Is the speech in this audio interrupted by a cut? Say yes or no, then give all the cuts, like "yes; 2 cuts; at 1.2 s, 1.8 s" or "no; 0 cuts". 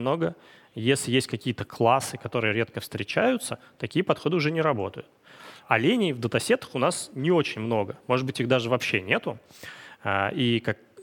no; 0 cuts